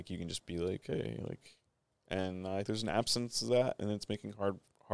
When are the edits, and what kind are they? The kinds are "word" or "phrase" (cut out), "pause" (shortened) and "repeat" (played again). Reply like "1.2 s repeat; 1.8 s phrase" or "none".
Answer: 2.7 s word